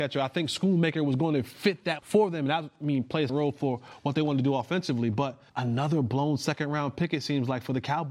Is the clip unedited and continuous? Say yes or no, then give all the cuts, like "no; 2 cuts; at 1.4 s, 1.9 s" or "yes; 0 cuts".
no; 3 cuts; at 2.0 s, 3.3 s, 5.5 s